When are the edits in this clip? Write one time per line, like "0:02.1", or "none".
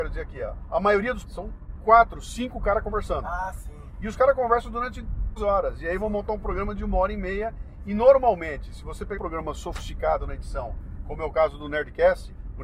0:01.2
0:05.4
0:09.2